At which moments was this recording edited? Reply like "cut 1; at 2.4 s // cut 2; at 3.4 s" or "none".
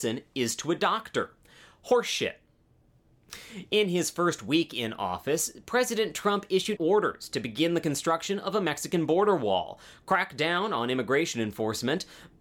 cut 1; at 6.8 s